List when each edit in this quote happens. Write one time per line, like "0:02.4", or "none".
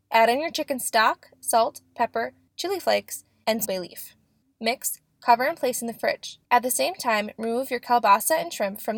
0:03.7
0:06.4